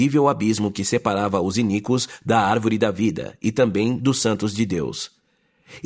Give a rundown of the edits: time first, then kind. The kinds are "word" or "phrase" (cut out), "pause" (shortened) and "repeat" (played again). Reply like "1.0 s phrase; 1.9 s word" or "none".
none